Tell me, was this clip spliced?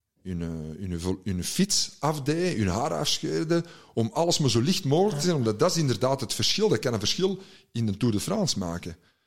no; 0 cuts

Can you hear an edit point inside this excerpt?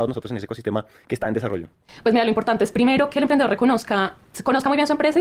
no; 0 cuts

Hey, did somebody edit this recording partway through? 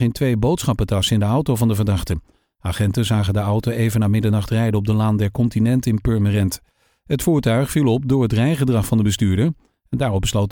no; 0 cuts

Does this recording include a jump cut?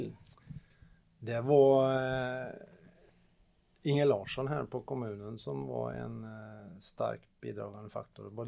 no; 0 cuts

